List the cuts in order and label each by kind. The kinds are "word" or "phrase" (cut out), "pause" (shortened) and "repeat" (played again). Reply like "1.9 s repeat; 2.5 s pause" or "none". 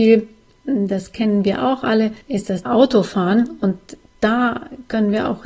2.2 s pause; 2.7 s word